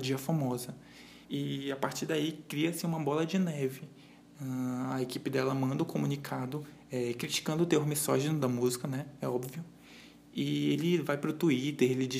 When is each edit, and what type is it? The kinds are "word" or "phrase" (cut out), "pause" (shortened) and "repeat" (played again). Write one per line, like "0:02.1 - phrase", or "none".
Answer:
0:01.2 - pause